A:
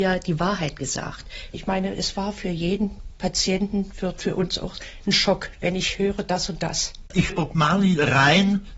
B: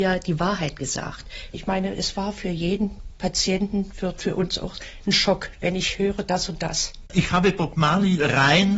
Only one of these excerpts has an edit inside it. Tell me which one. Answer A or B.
A